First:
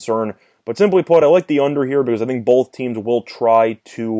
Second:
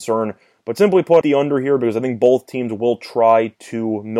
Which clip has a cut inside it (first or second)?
second